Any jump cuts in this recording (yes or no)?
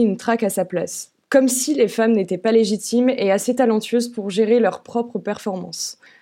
no